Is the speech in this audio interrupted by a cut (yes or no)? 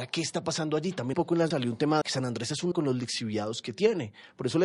yes